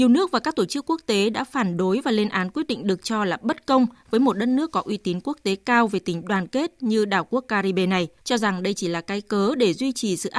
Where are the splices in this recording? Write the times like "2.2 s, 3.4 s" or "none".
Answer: 8.2 s